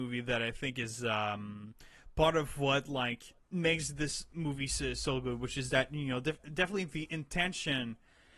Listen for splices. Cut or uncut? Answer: cut